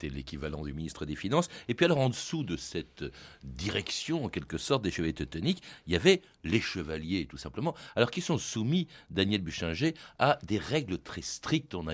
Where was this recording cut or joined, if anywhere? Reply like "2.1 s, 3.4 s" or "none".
none